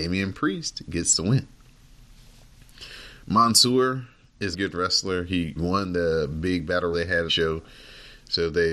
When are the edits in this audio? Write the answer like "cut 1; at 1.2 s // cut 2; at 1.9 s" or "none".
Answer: cut 1; at 4.5 s // cut 2; at 5.6 s // cut 3; at 6.9 s // cut 4; at 7.3 s